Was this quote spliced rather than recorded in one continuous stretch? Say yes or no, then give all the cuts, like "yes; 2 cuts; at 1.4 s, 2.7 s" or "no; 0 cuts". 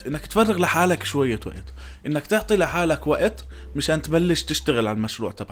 no; 0 cuts